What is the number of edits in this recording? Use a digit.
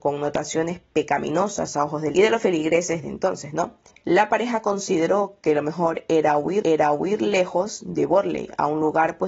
3